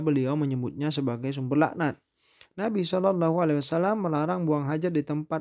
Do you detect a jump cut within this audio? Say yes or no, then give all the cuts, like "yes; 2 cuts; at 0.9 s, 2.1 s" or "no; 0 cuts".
no; 0 cuts